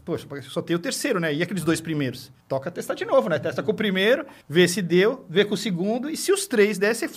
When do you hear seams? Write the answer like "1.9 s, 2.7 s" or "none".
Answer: 2.4 s, 4.4 s